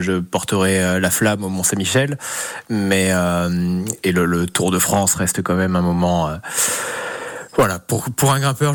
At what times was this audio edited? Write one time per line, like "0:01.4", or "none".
none